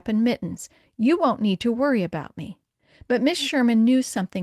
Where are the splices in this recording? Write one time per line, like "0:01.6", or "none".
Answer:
none